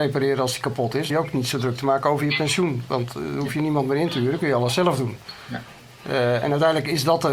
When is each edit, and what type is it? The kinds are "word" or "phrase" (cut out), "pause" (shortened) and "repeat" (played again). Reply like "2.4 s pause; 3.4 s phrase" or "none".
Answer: 1.1 s phrase